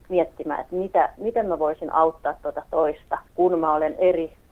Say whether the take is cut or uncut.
cut